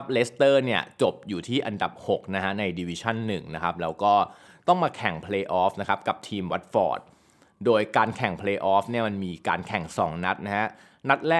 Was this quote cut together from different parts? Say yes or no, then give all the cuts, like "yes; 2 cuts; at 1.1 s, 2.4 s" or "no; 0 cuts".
no; 0 cuts